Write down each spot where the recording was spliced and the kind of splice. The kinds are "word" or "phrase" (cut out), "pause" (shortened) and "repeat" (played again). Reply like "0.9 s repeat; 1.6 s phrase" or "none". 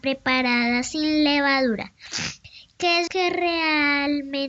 3.1 s word